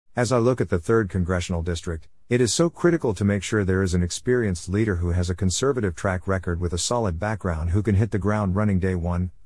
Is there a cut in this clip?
no; 0 cuts

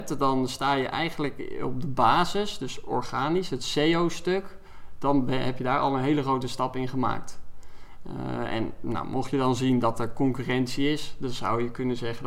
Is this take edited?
no; 0 cuts

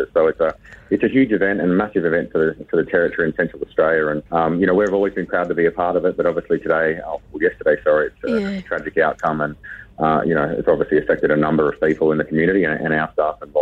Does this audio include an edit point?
yes; 1 cut; at 4.3 s

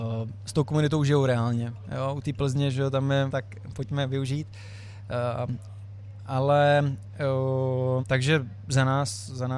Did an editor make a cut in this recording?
yes; 2 cuts; at 3.3 s, 8.0 s

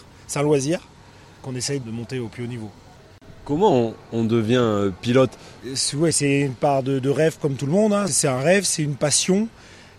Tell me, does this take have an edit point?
no; 0 cuts

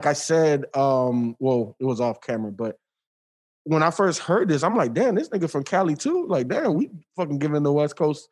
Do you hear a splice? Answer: no; 0 cuts

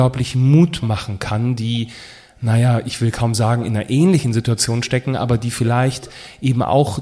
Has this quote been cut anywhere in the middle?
no; 0 cuts

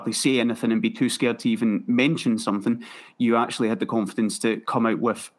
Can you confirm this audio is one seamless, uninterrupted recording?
yes; 0 cuts

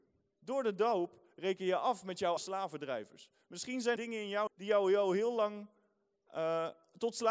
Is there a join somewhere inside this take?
yes; 3 cuts; at 2.4 s, 4.0 s, 4.5 s

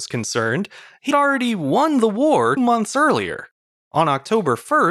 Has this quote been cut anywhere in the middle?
yes; 2 cuts; at 1.1 s, 2.6 s

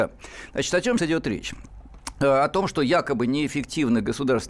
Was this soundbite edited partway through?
yes; 1 cut; at 1.0 s

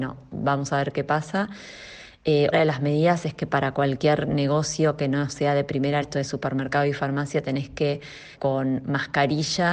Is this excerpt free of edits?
no; 3 cuts; at 2.5 s, 6.0 s, 8.3 s

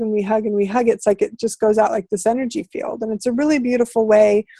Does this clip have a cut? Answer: no; 0 cuts

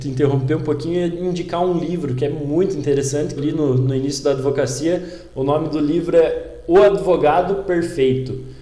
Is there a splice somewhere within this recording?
yes; 1 cut; at 3.4 s

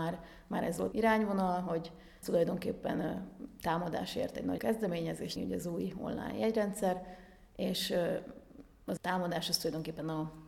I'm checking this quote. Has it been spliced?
yes; 5 cuts; at 0.9 s, 2.2 s, 4.6 s, 5.4 s, 9.0 s

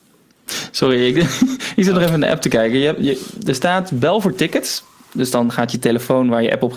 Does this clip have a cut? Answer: no; 0 cuts

